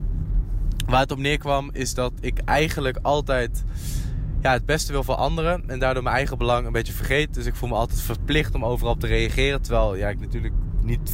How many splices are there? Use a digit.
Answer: 0